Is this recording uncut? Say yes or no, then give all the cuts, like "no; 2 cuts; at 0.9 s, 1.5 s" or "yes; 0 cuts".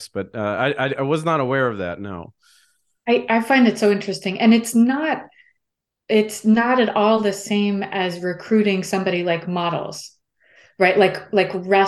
yes; 0 cuts